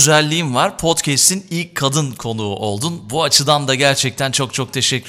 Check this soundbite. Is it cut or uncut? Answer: uncut